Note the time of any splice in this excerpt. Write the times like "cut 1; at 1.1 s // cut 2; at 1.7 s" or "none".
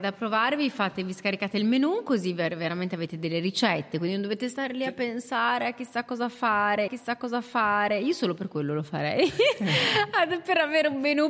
cut 1; at 6.9 s

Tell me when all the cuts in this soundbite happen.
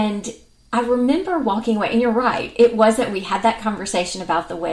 none

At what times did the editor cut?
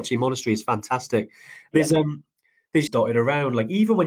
cut 1; at 2.9 s

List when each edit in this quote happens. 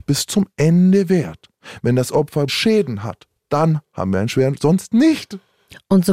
cut 1; at 2.5 s // cut 2; at 3.4 s

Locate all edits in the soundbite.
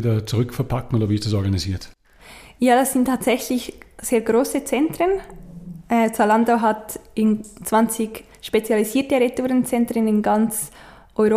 none

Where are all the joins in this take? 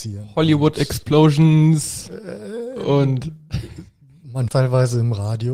cut 1; at 4.5 s

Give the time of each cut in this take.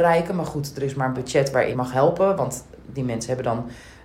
cut 1; at 1.1 s // cut 2; at 1.7 s

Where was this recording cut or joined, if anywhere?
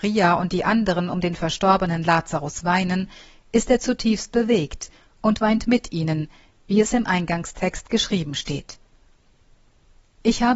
none

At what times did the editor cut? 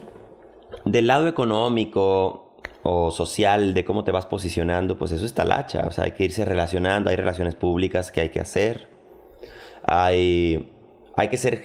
none

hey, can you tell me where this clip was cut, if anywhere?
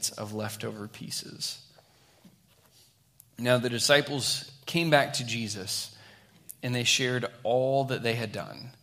none

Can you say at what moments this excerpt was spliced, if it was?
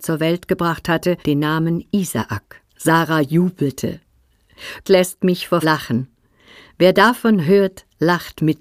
cut 1; at 1.2 s // cut 2; at 2.7 s // cut 3; at 4.8 s // cut 4; at 5.6 s

